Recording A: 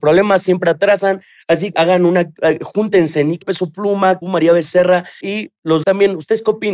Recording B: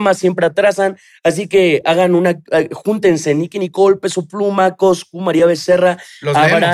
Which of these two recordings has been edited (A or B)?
A